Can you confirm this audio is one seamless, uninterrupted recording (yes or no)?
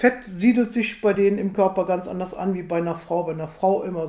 yes